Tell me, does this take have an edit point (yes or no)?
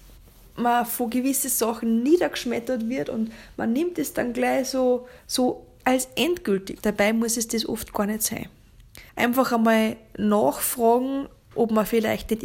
yes